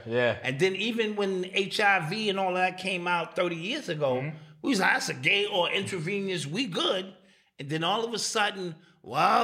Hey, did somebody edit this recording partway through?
no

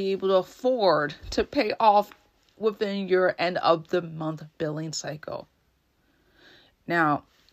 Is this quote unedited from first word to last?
yes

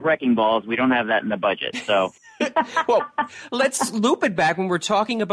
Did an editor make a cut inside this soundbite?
yes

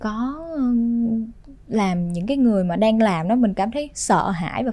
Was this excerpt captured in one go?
yes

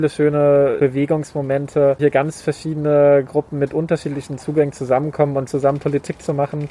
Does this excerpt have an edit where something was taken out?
yes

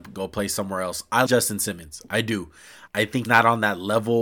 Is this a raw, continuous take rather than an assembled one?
no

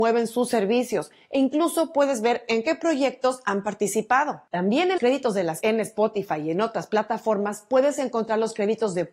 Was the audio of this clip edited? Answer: yes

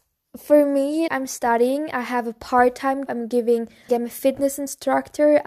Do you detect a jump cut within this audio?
yes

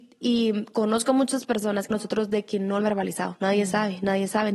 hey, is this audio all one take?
no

